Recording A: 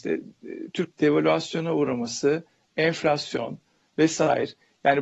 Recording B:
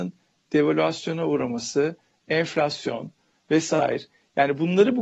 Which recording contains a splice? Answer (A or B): A